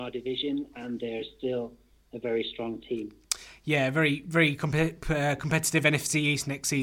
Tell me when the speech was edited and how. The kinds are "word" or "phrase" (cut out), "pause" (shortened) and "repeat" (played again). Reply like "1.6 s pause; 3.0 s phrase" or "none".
none